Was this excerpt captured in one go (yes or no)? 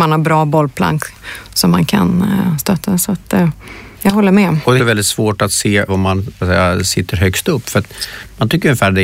no